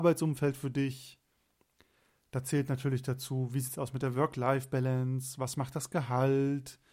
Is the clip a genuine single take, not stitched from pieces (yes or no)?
yes